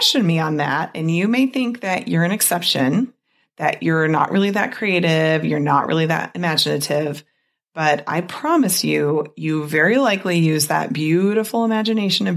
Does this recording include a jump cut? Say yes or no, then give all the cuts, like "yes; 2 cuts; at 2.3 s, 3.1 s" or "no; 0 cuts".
no; 0 cuts